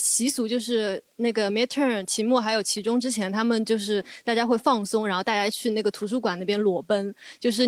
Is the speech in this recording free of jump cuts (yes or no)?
yes